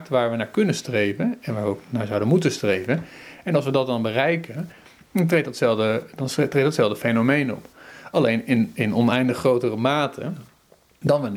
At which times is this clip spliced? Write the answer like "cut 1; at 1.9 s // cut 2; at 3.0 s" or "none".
none